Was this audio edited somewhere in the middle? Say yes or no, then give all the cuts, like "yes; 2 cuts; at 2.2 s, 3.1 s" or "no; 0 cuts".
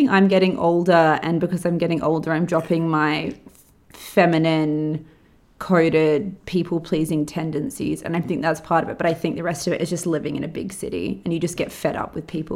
no; 0 cuts